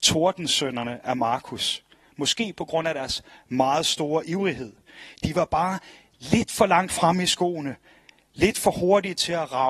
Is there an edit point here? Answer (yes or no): no